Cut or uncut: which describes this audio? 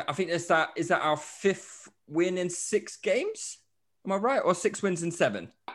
uncut